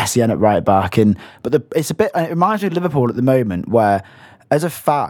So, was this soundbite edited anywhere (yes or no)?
no